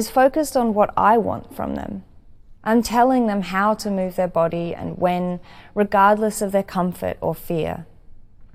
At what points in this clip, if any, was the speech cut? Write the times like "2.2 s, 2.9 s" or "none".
2.6 s